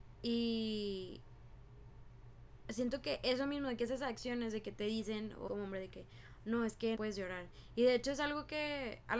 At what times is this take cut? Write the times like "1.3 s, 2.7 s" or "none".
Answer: 5.5 s, 6.9 s